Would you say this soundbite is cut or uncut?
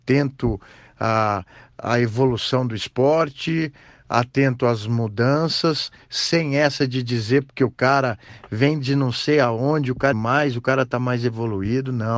cut